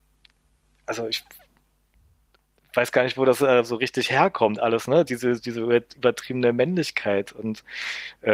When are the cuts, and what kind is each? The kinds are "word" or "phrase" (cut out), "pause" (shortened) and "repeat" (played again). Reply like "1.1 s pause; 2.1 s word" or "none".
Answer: none